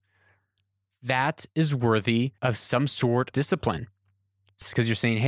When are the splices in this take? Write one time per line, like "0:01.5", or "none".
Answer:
0:02.4
0:03.3